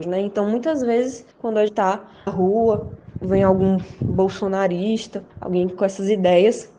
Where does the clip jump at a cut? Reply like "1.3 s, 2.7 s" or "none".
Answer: 1.3 s, 1.7 s, 2.3 s, 5.3 s, 5.8 s